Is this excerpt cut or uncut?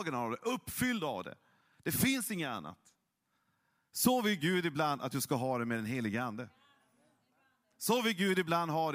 uncut